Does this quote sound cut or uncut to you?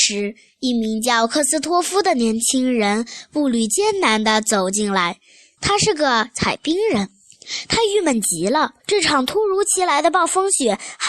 cut